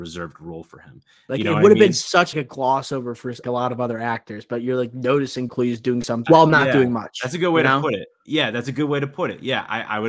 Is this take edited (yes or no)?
yes